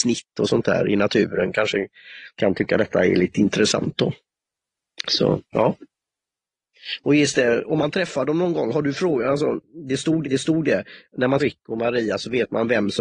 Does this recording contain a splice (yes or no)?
yes